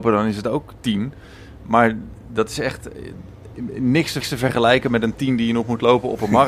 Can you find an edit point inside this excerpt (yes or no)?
yes